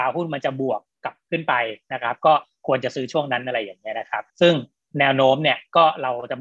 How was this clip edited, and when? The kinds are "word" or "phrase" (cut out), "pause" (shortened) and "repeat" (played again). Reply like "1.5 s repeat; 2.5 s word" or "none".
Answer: 4.3 s pause